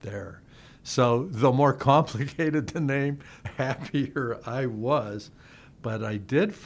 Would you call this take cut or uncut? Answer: cut